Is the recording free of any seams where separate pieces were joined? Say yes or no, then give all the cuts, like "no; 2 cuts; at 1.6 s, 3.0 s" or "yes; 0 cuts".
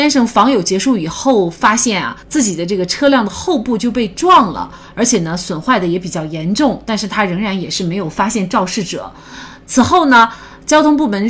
no; 1 cut; at 2.2 s